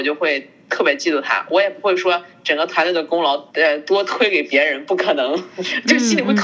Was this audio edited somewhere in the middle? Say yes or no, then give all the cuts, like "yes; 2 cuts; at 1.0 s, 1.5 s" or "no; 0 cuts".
yes; 1 cut; at 3.5 s